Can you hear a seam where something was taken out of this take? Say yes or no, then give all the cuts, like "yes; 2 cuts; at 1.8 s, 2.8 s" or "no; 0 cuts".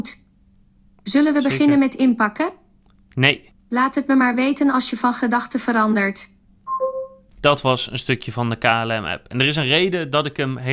no; 0 cuts